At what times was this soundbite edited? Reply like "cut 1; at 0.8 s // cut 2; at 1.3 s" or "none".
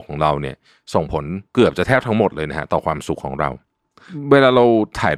cut 1; at 1.5 s